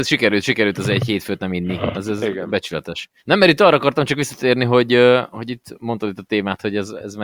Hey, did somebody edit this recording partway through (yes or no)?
yes